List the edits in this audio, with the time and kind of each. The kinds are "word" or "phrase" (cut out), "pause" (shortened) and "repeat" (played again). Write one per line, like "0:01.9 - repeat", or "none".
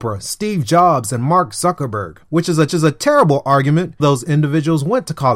0:02.2 - pause
0:02.7 - repeat
0:04.0 - phrase